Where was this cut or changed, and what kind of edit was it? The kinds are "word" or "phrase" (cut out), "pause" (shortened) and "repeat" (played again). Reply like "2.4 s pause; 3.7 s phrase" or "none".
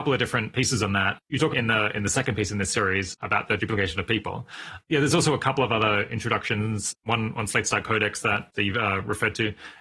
1.5 s phrase; 3.6 s word

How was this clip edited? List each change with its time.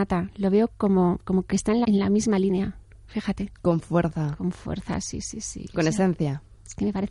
1.8 s word

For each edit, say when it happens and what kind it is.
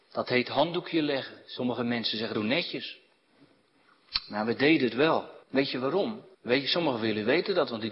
2.3 s phrase; 5.4 s pause; 6.3 s pause

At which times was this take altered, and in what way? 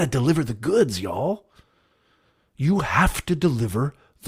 none

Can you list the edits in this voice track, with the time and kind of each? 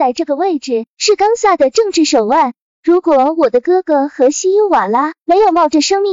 none

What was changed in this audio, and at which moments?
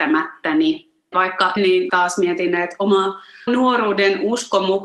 1.1 s word; 1.6 s word; 1.9 s word; 3.5 s word

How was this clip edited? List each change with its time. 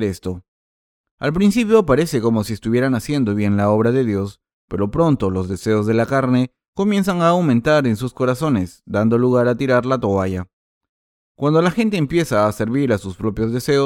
none

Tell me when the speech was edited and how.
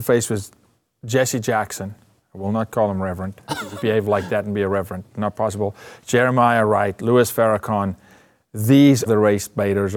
3.8 s word; 9.1 s word

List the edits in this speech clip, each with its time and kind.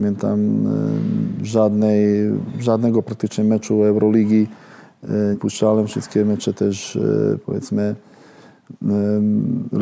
5.3 s word

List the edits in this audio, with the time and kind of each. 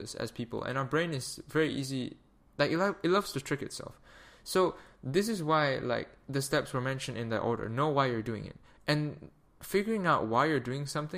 none

